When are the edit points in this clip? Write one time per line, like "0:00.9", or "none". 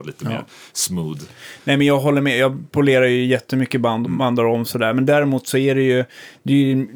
0:04.0